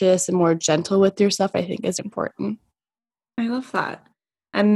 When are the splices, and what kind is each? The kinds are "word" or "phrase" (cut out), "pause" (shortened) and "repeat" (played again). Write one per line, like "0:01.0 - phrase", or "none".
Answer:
0:02.0 - word